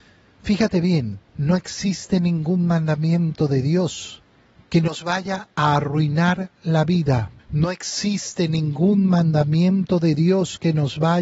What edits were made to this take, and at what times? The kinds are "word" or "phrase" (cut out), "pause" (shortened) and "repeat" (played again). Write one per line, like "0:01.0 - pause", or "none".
0:01.3 - pause
0:04.3 - pause
0:05.5 - pause
0:07.4 - pause